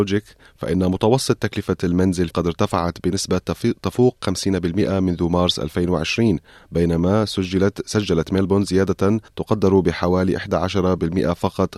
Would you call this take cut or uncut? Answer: cut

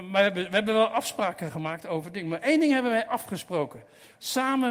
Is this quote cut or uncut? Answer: uncut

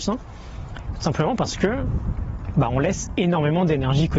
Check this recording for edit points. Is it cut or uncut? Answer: uncut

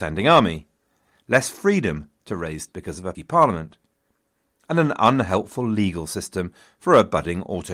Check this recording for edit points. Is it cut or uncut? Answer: cut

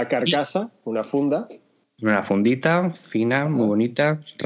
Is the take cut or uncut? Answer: uncut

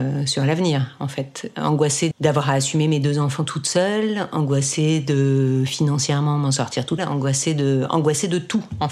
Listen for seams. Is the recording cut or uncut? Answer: cut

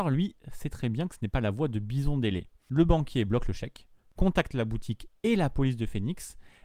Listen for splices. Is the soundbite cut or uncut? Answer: uncut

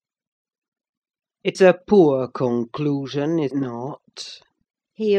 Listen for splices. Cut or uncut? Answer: cut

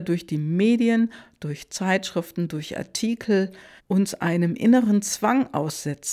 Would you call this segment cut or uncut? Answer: cut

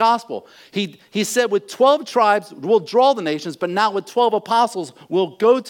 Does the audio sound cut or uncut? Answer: uncut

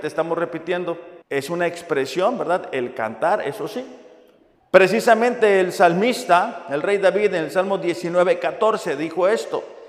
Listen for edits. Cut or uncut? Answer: cut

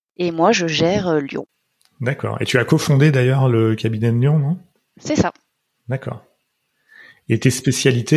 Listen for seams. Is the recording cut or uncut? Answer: uncut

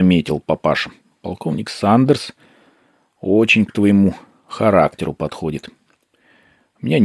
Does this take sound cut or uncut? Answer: uncut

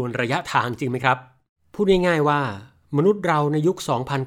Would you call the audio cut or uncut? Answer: uncut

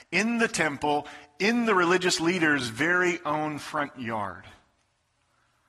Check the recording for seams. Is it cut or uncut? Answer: uncut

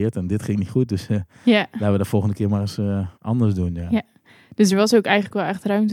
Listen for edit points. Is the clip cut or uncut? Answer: cut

